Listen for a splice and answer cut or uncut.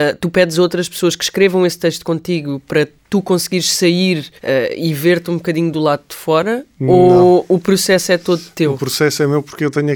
cut